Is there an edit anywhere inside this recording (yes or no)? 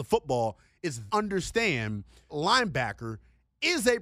yes